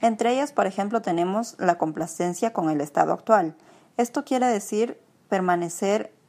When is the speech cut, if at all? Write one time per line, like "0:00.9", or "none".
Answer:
none